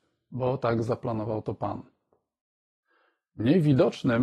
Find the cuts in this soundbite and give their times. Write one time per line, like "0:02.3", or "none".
none